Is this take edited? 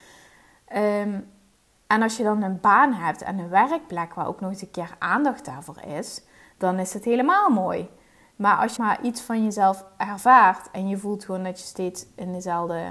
yes; 1 cut; at 8.8 s

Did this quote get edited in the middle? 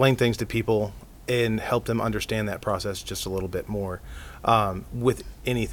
no; 0 cuts

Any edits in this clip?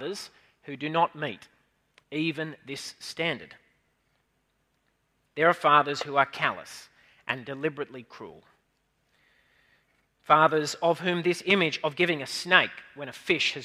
no; 0 cuts

